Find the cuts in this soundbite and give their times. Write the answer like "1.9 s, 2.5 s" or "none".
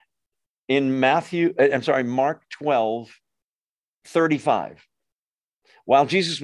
none